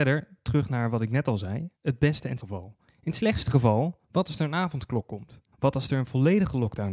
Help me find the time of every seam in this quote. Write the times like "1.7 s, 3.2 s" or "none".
1.7 s, 2.4 s, 5.5 s